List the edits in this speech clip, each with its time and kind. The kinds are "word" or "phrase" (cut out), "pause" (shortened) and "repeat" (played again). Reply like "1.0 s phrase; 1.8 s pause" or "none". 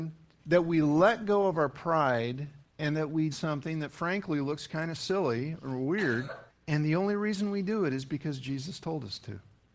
2.7 s pause; 3.3 s word; 6.5 s pause